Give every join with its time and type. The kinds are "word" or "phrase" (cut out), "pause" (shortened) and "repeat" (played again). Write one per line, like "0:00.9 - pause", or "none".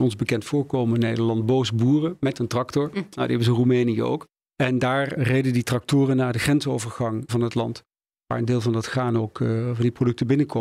0:07.3 - phrase